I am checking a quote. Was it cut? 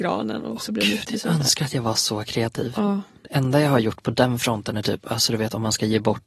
no; 0 cuts

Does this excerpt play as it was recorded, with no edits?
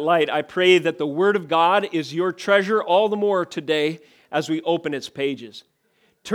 yes; 0 cuts

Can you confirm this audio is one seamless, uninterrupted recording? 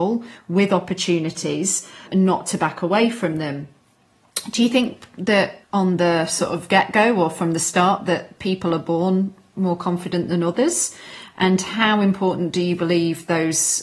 no; 1 cut; at 5.6 s

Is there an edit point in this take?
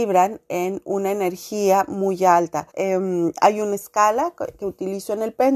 yes; 1 cut; at 2.7 s

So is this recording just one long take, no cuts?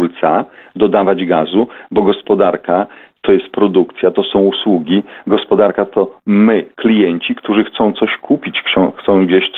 yes; 0 cuts

